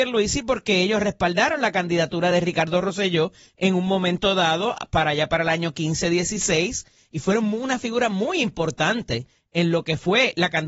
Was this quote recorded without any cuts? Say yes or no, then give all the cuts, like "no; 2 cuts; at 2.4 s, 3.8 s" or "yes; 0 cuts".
yes; 0 cuts